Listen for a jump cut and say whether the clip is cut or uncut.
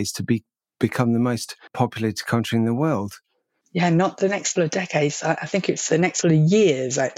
cut